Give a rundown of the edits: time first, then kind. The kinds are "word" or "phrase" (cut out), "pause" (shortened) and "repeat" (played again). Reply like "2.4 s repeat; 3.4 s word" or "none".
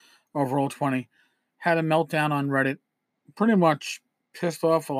none